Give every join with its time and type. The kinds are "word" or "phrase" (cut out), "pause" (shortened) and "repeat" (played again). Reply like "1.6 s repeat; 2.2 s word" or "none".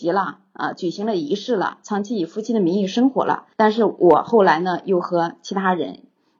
3.5 s pause

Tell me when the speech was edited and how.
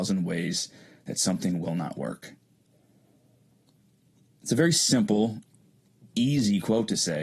none

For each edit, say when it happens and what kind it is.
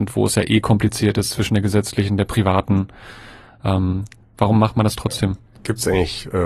none

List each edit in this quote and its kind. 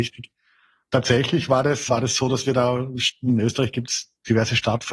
1.9 s word

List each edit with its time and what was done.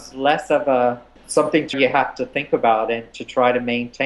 1.2 s phrase; 1.7 s word

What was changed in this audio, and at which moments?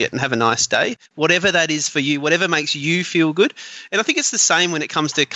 1.1 s pause

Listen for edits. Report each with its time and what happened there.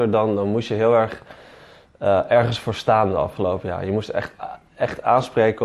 none

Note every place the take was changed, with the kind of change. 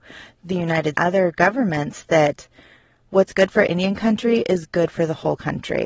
0.9 s phrase

